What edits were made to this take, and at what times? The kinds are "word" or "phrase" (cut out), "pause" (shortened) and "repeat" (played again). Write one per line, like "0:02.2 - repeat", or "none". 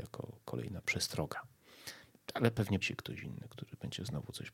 0:02.8 - word

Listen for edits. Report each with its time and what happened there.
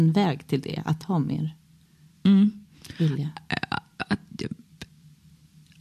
none

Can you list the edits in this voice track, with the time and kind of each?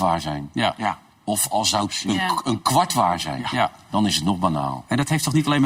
none

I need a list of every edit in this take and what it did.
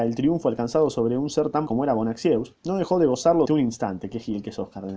0:01.7 - word
0:03.5 - word

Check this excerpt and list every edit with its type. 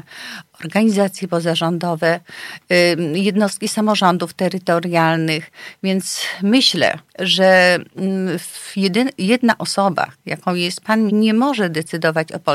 0:07.1 - pause
0:11.1 - phrase

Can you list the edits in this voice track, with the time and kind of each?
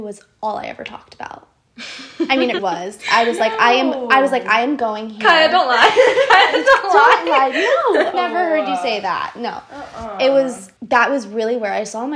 0:02.6 - word
0:08.1 - word
0:10.8 - pause

